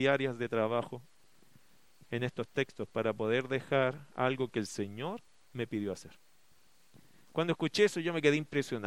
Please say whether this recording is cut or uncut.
uncut